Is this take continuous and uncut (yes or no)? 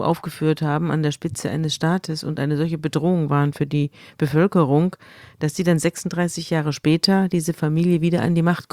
yes